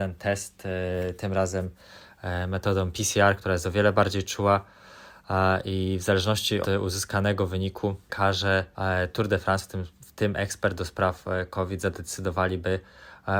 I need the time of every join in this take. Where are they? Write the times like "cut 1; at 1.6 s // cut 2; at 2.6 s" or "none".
cut 1; at 6.6 s